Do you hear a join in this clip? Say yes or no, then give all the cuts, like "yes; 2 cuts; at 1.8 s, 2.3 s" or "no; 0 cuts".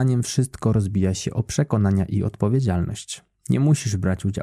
no; 0 cuts